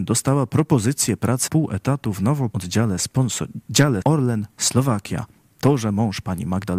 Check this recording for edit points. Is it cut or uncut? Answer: cut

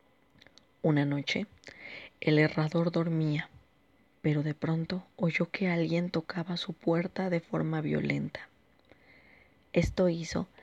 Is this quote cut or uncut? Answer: uncut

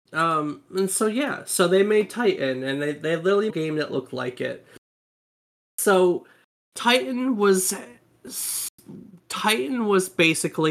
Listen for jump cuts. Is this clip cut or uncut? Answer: cut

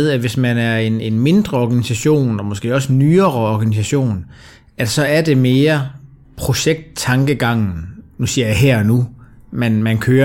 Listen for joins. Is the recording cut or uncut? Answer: uncut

